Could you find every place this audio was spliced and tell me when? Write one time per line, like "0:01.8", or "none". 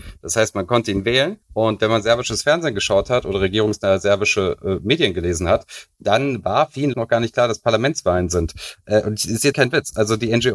0:01.4
0:06.9
0:09.5